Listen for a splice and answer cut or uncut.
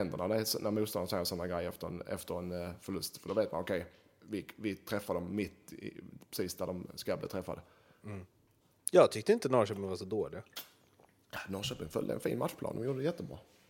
uncut